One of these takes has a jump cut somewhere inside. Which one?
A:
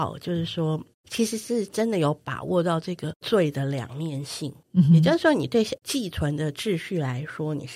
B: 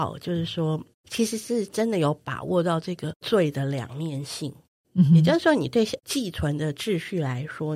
A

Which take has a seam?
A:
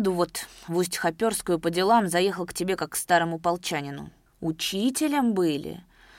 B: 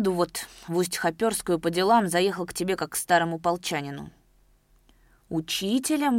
A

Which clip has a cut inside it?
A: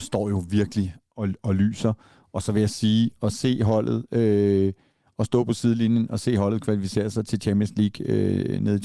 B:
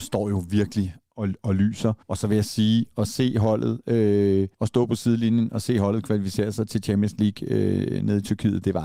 B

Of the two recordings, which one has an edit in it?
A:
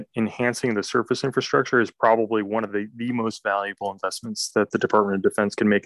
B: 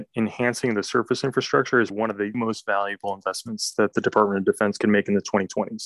B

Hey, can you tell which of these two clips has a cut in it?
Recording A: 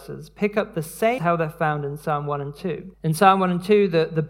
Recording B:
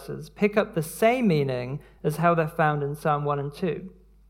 A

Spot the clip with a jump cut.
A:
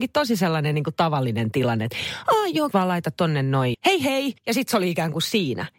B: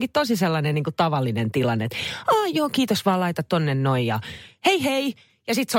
A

